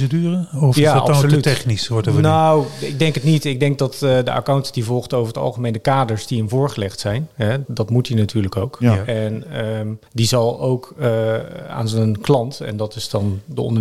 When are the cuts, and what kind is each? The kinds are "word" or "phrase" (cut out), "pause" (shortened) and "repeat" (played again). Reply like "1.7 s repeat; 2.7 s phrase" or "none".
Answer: 7.6 s word; 10.1 s pause